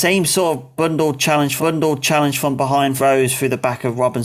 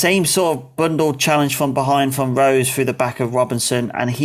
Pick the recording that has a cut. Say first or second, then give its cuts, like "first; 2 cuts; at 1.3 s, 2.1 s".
first; 2 cuts; at 1.6 s, 3.0 s